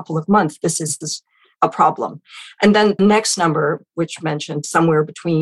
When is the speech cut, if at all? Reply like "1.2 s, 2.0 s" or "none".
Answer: 1.0 s, 1.6 s, 3.0 s, 4.2 s